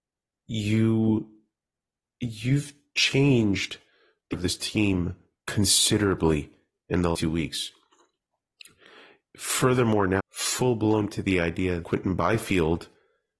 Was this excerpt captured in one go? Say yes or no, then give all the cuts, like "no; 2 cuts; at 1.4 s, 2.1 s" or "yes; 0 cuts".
no; 5 cuts; at 4.3 s, 7.1 s, 10.2 s, 11.1 s, 11.8 s